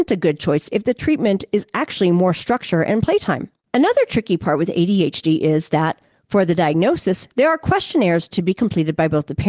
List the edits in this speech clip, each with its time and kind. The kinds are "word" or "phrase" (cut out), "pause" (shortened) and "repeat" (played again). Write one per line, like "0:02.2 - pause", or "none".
none

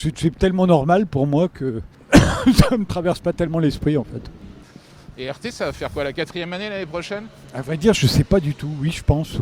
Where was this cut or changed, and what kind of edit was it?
none

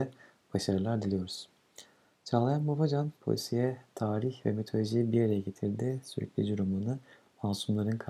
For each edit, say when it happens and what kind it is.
0:03.2 - pause

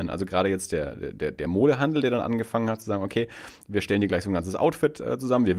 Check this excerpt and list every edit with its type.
none

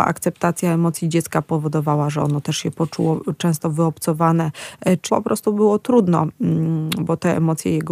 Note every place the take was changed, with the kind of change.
0:05.1 - word

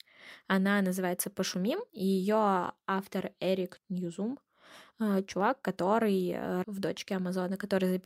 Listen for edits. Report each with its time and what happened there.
0:01.9 - pause
0:03.8 - word
0:06.6 - phrase

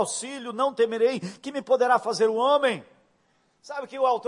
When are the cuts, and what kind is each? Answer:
none

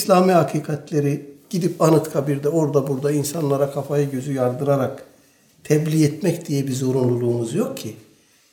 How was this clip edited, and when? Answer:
none

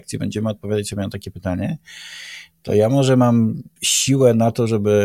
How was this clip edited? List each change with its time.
0:03.8 - pause

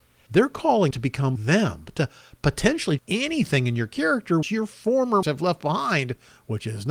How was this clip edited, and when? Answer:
0:00.9 - word
0:01.4 - word
0:03.0 - word
0:04.4 - word
0:05.2 - word

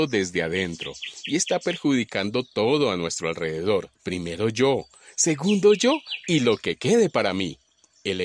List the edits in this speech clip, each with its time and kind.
0:04.0 - pause

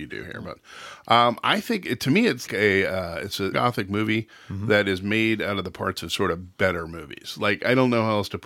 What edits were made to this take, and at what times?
0:02.5 - word
0:03.5 - phrase

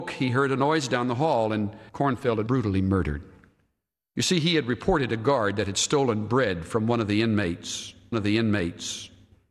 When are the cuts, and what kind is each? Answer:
0:01.9 - pause
0:02.5 - word
0:08.1 - repeat

